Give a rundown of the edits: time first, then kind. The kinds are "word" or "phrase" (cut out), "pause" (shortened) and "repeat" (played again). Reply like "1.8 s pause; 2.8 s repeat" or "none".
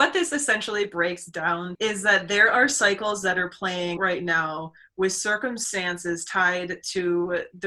1.7 s word; 4.0 s word